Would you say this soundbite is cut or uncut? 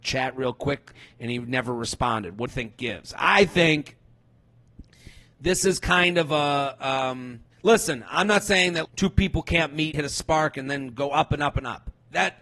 cut